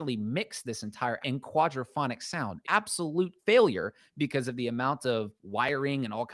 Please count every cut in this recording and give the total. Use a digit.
4